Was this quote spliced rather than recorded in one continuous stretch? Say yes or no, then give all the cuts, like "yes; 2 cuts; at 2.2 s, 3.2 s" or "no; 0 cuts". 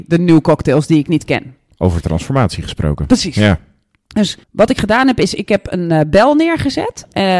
yes; 1 cut; at 4.4 s